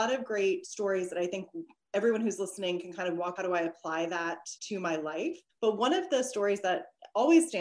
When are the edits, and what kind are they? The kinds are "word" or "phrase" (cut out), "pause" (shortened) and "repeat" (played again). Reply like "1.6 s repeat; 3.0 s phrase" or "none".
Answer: 3.4 s phrase; 4.6 s pause; 5.5 s pause